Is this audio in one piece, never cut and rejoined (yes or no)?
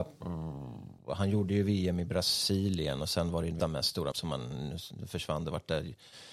no